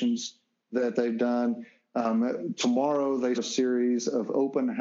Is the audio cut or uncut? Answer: cut